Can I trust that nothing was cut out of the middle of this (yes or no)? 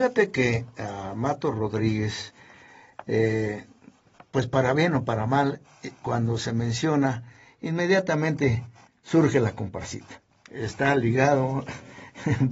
yes